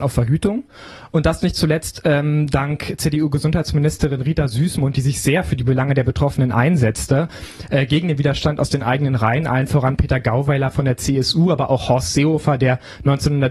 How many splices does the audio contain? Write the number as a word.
zero